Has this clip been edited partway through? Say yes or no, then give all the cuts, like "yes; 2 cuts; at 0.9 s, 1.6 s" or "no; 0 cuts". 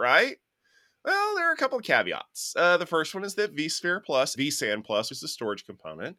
yes; 2 cuts; at 4.4 s, 5.1 s